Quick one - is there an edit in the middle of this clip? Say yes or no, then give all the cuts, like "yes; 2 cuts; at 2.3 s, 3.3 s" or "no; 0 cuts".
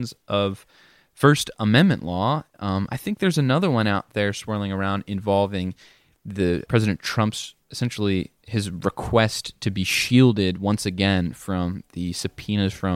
yes; 2 cuts; at 6.6 s, 7.6 s